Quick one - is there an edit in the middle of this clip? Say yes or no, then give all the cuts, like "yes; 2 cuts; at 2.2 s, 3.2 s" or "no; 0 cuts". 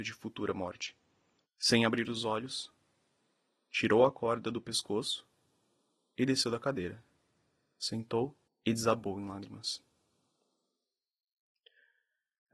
yes; 1 cut; at 8.5 s